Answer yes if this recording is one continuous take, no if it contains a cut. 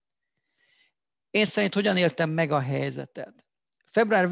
no